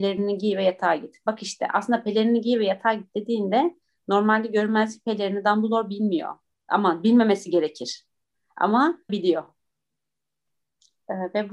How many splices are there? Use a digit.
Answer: 1